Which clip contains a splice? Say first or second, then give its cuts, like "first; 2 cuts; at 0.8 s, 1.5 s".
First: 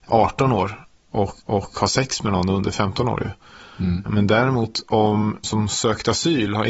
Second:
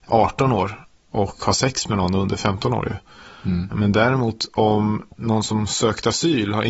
first; 2 cuts; at 1.4 s, 5.4 s